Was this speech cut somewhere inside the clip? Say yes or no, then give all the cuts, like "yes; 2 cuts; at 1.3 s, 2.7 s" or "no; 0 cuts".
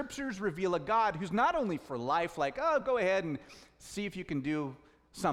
no; 0 cuts